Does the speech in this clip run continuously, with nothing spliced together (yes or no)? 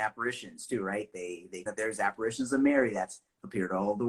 no